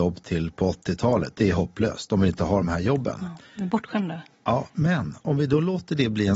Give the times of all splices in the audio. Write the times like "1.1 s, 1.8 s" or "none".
none